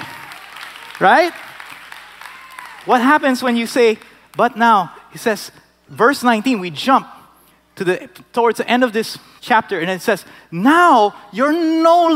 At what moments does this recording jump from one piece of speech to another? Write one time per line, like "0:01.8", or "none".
none